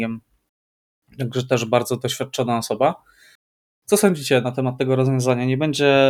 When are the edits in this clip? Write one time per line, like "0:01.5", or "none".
none